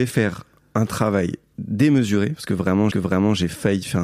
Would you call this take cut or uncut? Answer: cut